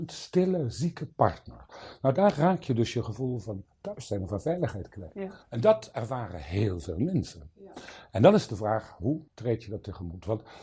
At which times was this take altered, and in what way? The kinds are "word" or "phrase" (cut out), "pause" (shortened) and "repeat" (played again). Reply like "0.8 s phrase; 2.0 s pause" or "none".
5.4 s pause; 9.3 s pause